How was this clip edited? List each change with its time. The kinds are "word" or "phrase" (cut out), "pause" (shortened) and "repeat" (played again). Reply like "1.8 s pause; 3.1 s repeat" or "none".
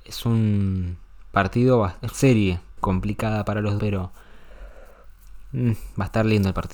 2.1 s word; 2.8 s word; 3.8 s word